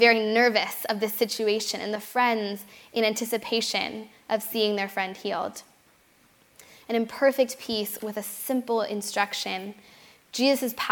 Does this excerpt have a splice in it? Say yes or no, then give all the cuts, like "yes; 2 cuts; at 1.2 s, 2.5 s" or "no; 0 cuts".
no; 0 cuts